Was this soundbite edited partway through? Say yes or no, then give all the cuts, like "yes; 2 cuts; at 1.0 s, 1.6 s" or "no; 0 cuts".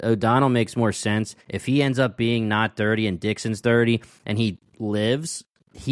yes; 1 cut; at 1.4 s